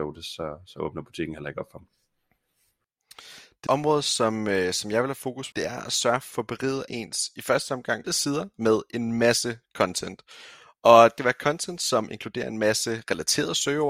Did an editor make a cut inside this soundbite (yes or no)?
yes